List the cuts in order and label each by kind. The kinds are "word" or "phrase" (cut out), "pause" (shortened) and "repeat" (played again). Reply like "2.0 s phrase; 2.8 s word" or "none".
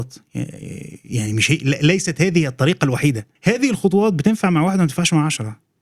3.4 s pause

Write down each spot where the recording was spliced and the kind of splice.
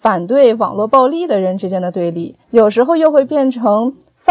2.4 s pause

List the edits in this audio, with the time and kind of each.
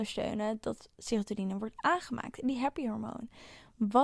none

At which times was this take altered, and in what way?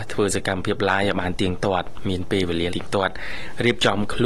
2.7 s word

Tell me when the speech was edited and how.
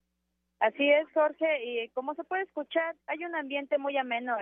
3.0 s pause

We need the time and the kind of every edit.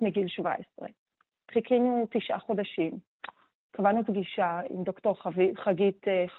none

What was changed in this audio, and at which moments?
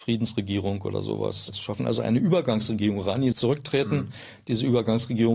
1.5 s word; 3.3 s word

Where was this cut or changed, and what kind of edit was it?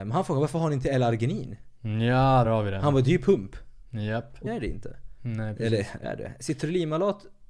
2.4 s word; 4.5 s word; 6.0 s word

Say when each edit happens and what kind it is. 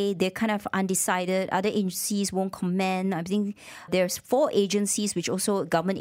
3.9 s word

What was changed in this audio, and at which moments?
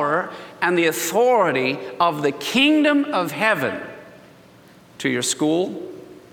none

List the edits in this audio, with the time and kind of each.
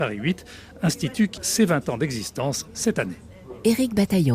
1.4 s word

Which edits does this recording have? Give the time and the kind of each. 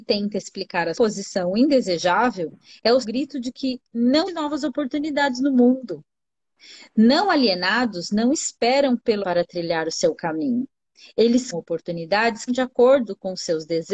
0.9 s word; 3.0 s word; 4.3 s word; 9.2 s word; 11.5 s word; 12.5 s word

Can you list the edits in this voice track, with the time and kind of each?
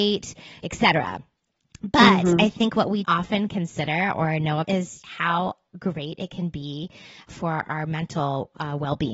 3.0 s word; 4.6 s word; 5.0 s word; 7.3 s word

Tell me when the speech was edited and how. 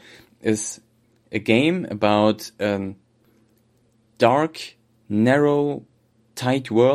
none

